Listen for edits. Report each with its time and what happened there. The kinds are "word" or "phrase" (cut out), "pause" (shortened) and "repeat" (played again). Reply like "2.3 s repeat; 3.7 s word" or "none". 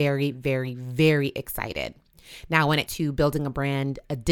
2.9 s word